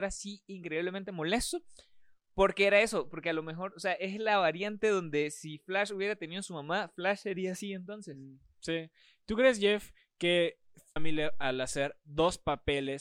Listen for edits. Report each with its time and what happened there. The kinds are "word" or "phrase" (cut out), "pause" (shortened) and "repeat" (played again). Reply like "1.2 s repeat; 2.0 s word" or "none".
11.0 s word